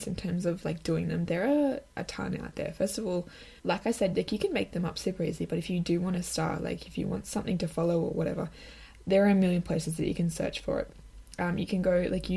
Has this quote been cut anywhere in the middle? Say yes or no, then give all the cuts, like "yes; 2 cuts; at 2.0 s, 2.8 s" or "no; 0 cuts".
yes; 1 cut; at 3.6 s